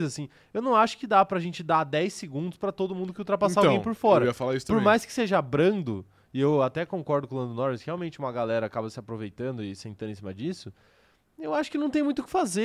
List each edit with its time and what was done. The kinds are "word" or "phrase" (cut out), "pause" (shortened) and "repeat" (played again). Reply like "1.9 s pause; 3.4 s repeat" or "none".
none